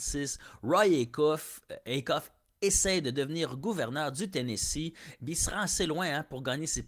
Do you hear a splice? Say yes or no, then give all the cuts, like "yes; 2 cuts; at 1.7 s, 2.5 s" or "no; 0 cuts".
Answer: no; 0 cuts